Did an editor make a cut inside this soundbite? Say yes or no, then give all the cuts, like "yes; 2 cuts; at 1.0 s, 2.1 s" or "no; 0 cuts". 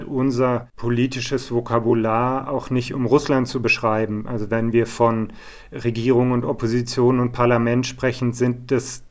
no; 0 cuts